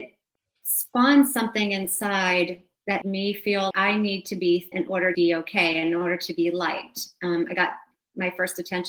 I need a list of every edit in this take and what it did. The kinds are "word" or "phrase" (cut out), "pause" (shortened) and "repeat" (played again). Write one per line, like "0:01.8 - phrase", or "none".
0:03.0 - word
0:03.7 - word
0:04.7 - word
0:05.1 - word